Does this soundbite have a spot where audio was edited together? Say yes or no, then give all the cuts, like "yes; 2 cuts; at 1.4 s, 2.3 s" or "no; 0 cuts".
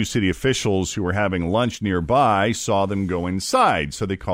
no; 0 cuts